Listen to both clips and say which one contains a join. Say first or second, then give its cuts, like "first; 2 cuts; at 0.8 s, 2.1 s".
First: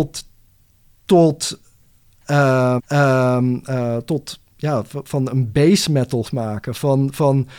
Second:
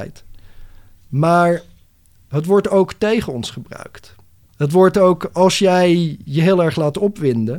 first; 2 cuts; at 2.8 s, 6.2 s